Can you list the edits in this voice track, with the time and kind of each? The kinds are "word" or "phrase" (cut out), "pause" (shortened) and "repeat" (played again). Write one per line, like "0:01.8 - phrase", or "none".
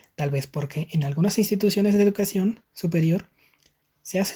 none